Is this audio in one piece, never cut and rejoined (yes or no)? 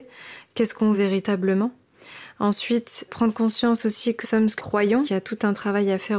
no